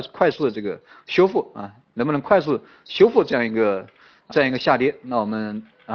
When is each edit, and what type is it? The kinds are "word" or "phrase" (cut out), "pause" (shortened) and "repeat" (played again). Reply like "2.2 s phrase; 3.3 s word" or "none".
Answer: 4.3 s word